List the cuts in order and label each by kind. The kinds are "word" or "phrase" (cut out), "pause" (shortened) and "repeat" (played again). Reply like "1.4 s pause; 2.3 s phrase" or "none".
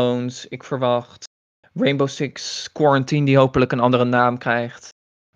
none